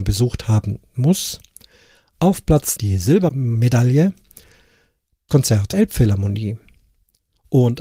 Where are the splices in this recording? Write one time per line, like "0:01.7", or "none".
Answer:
0:02.8
0:05.3
0:05.7